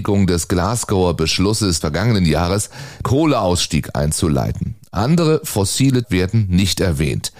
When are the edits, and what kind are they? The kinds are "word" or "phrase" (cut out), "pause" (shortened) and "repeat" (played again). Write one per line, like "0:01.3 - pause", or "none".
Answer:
0:01.8 - word
0:03.0 - word
0:06.0 - word

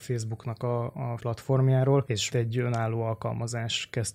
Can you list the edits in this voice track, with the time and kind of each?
0:01.2 - word
0:02.3 - word

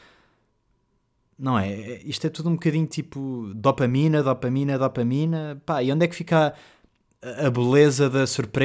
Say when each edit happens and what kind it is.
none

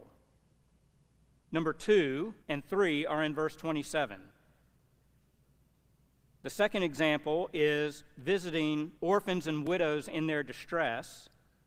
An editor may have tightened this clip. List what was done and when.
0:02.4 - pause
0:09.0 - pause

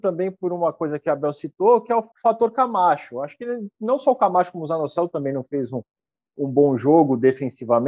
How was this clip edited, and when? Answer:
0:02.1 - pause

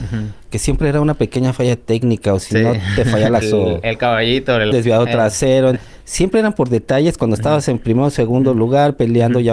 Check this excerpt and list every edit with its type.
0:03.4 - phrase
0:04.7 - phrase
0:05.8 - word

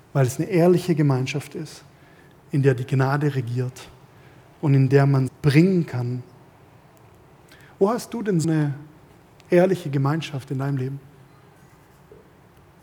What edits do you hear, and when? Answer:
0:05.3 - word
0:08.4 - word

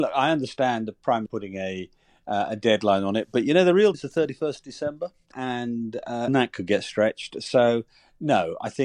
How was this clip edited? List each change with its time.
0:01.3 - word
0:03.9 - word
0:05.3 - word
0:06.3 - word

